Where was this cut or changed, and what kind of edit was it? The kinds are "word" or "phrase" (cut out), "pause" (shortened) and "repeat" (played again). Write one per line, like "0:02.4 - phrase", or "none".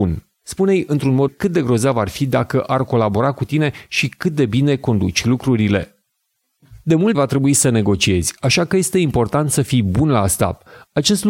0:01.3 - phrase
0:07.1 - word